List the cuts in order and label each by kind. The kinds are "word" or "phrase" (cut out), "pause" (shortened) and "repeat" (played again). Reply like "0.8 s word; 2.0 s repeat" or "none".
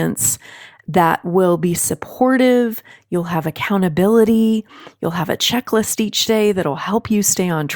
none